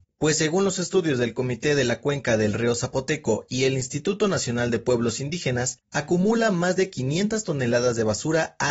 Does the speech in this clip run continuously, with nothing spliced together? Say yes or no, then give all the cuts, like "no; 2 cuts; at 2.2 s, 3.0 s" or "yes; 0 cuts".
yes; 0 cuts